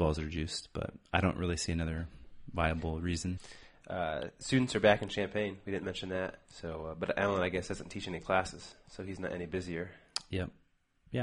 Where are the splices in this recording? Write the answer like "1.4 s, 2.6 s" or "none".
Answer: 6.4 s